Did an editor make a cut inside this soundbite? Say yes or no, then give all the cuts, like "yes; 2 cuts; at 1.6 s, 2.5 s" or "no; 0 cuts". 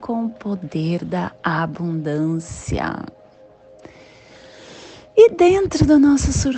yes; 1 cut; at 5.1 s